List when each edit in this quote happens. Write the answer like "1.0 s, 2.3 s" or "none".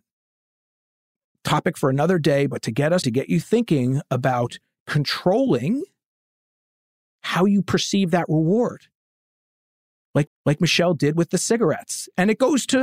3.0 s, 10.3 s